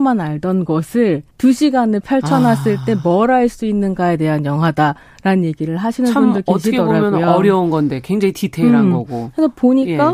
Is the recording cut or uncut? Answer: cut